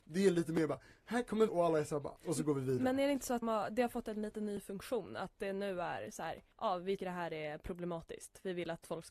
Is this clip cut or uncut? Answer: cut